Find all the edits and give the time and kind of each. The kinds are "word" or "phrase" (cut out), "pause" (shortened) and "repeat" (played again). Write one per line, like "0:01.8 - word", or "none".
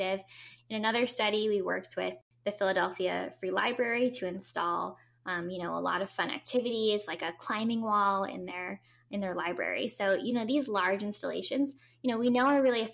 none